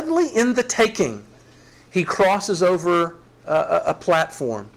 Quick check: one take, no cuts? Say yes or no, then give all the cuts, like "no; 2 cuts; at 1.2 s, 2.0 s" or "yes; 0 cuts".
yes; 0 cuts